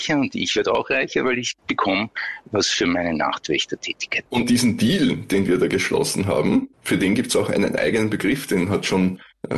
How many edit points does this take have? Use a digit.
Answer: 1